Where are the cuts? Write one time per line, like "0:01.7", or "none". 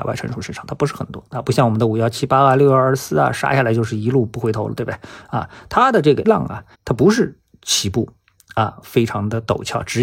0:06.2
0:06.7